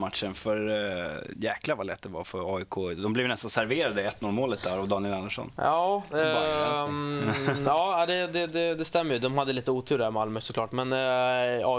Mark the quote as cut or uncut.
uncut